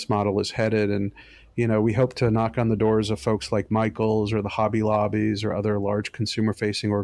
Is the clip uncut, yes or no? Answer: yes